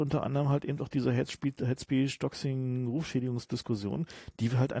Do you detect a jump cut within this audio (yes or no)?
no